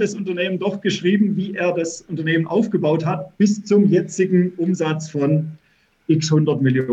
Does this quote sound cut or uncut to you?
uncut